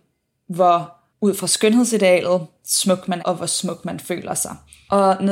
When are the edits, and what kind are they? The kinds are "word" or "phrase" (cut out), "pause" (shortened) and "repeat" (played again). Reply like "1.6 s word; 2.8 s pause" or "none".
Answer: 1.1 s pause; 3.2 s word

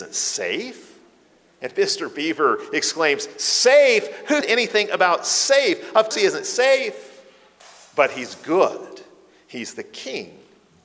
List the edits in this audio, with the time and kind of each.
4.4 s word; 6.1 s word

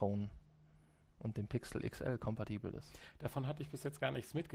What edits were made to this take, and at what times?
none

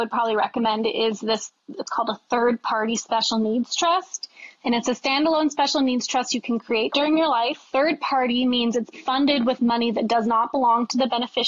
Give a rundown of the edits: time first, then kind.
8.9 s word

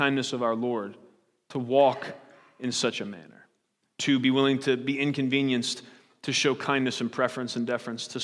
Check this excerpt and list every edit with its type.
none

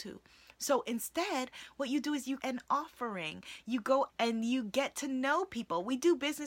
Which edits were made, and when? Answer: 2.4 s word; 4.1 s word

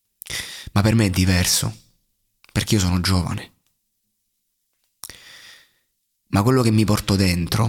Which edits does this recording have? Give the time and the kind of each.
none

